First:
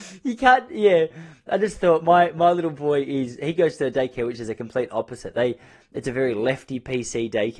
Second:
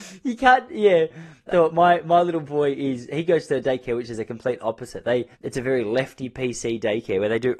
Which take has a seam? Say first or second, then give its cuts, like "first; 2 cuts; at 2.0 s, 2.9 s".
second; 2 cuts; at 1.5 s, 5.3 s